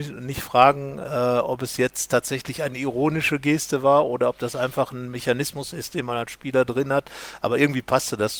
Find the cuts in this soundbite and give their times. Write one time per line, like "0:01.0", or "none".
none

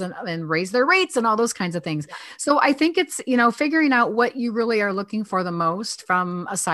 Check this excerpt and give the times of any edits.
none

